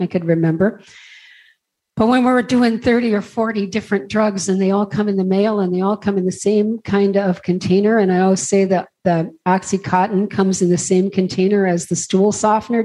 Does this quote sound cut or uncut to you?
uncut